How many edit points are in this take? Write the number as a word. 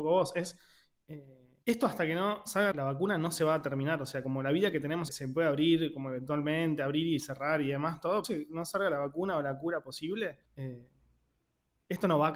five